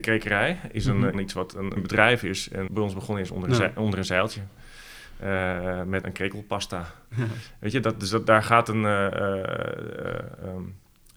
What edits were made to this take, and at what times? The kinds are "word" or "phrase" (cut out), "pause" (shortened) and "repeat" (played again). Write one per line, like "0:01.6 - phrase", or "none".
0:01.1 - phrase
0:01.8 - word
0:02.7 - word
0:06.0 - word